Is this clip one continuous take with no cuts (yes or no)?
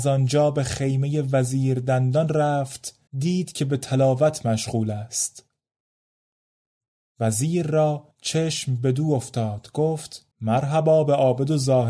no